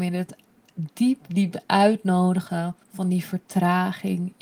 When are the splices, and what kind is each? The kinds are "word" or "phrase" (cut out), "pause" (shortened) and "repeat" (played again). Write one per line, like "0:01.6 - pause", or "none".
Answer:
0:02.8 - pause